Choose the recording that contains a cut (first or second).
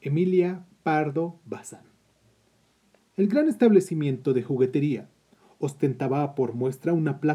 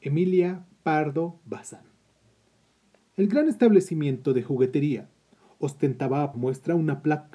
second